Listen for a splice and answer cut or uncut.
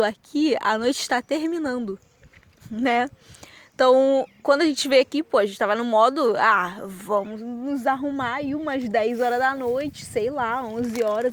uncut